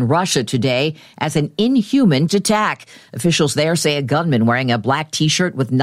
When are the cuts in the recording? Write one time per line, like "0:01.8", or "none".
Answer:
0:02.3